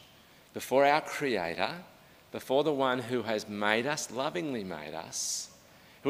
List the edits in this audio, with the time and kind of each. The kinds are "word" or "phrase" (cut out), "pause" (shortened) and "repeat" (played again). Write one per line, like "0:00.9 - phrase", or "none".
none